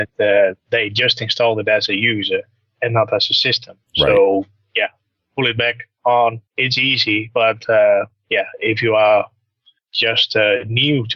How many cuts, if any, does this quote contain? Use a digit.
1